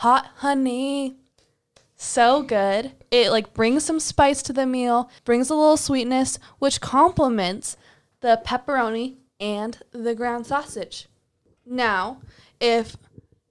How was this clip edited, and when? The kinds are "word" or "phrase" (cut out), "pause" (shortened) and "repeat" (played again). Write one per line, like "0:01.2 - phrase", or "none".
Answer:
0:05.2 - pause